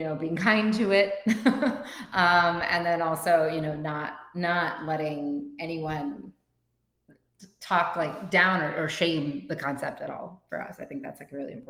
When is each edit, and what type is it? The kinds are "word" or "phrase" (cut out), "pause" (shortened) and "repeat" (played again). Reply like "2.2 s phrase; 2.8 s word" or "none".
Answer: none